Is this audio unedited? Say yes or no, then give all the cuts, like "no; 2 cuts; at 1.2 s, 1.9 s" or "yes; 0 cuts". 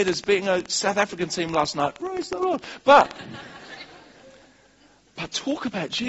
yes; 0 cuts